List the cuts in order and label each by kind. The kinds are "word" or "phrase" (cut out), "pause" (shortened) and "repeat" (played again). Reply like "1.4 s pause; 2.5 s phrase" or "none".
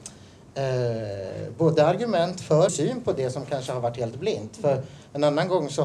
2.7 s phrase